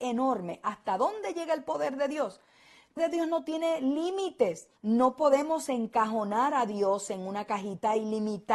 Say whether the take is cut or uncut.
cut